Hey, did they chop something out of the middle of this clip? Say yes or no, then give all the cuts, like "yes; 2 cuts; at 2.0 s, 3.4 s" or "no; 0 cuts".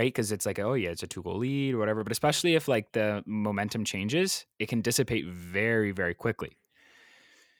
yes; 1 cut; at 4.5 s